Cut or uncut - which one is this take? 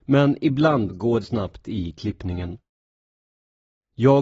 cut